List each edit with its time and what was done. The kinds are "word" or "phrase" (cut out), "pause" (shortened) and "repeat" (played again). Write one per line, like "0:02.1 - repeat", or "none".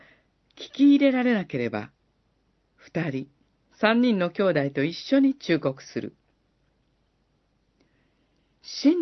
0:03.4 - pause